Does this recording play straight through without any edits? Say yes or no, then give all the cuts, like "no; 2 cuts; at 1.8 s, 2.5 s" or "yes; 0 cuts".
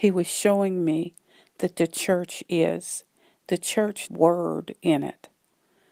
no; 1 cut; at 4.1 s